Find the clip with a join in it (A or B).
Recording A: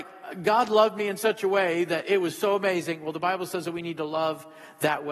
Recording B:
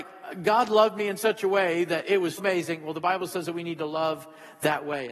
B